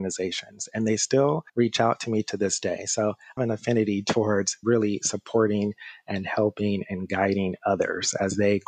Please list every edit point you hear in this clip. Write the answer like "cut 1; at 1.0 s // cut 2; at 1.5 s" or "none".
cut 1; at 1.5 s // cut 2; at 3.4 s // cut 3; at 4.6 s